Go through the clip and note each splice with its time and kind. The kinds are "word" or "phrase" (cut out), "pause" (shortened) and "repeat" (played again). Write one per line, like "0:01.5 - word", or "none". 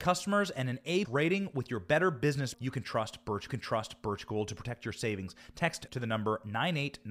0:01.0 - word
0:02.5 - word
0:03.5 - repeat
0:05.9 - word